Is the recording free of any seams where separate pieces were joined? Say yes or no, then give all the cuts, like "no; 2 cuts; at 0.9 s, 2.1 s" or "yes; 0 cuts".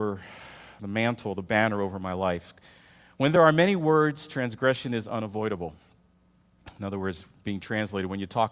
yes; 0 cuts